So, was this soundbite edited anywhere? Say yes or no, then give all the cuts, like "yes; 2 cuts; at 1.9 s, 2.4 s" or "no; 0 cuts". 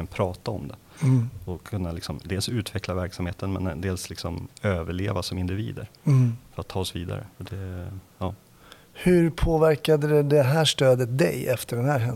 yes; 2 cuts; at 4.5 s, 7.3 s